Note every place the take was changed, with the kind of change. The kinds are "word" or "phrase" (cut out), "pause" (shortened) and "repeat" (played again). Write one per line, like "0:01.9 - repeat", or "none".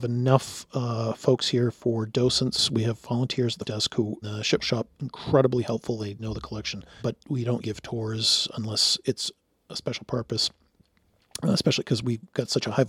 0:03.6 - word
0:04.2 - word
0:04.6 - word
0:06.2 - word
0:07.0 - word
0:07.6 - word